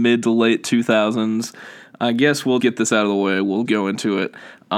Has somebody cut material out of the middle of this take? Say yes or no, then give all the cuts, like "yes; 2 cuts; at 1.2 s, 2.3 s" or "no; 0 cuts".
yes; 2 cuts; at 2.6 s, 3.7 s